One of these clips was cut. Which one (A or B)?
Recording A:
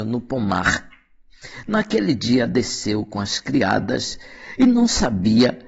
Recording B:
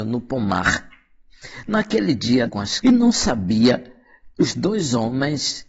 B